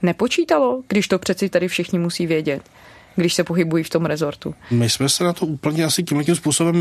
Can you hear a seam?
no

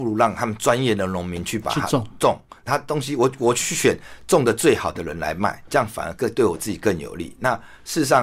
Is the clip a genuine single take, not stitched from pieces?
no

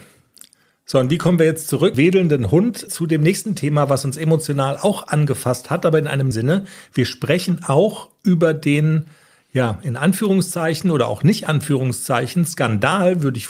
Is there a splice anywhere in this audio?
yes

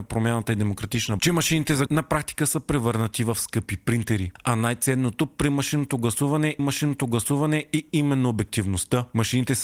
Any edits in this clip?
yes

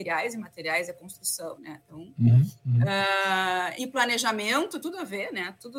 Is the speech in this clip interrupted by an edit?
yes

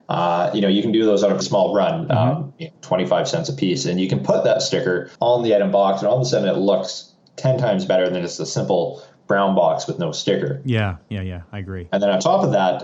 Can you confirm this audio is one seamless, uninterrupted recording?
no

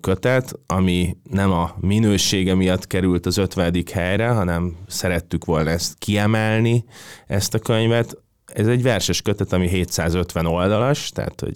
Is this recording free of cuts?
yes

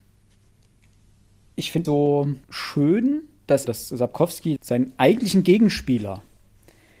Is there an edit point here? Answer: yes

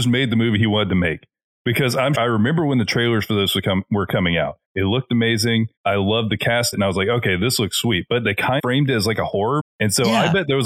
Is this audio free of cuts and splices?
no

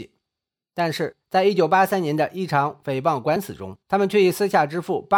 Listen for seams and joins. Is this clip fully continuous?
no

